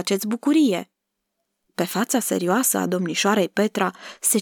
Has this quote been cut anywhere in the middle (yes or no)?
no